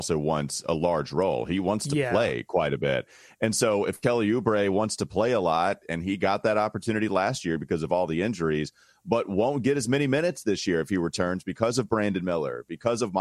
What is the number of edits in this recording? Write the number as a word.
zero